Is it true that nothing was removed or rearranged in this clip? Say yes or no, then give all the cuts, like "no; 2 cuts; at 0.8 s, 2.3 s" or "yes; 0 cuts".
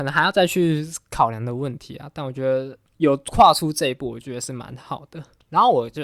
no; 1 cut; at 2.8 s